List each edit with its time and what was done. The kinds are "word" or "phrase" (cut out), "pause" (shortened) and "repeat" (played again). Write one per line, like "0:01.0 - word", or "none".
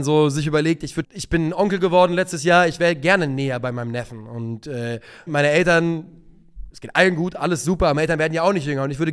0:01.0 - word
0:05.3 - word
0:06.7 - word